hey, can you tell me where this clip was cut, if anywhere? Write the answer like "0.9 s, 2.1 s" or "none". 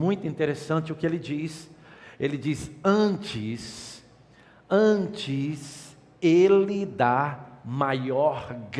none